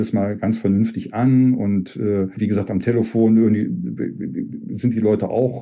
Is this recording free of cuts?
yes; 0 cuts

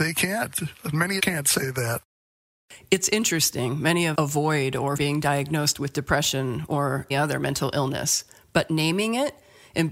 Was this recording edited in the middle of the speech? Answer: yes; 4 cuts; at 1.2 s, 4.1 s, 5.0 s, 7.1 s

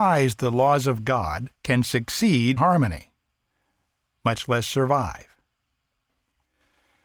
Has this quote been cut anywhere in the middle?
yes; 2 cuts; at 1.5 s, 2.6 s

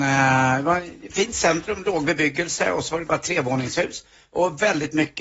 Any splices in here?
no; 0 cuts

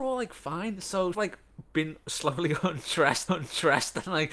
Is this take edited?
yes; 2 cuts; at 1.1 s, 3.3 s

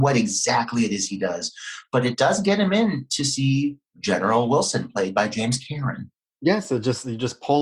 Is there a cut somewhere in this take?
yes; 2 cuts; at 3.9 s, 6.3 s

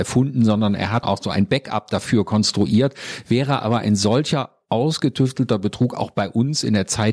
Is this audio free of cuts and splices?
no; 1 cut; at 1.0 s

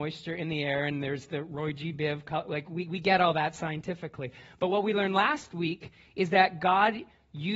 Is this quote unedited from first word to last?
yes; 0 cuts

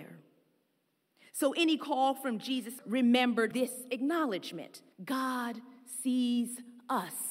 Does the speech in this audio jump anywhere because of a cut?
yes; 3 cuts; at 2.8 s, 3.5 s, 4.9 s

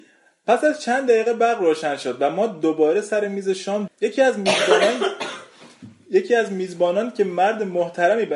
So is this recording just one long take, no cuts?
no; 1 cut; at 3.9 s

